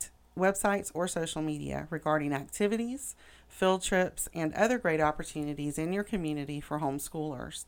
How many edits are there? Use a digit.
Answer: 0